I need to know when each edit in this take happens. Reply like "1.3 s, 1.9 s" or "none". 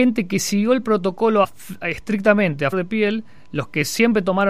1.4 s, 2.7 s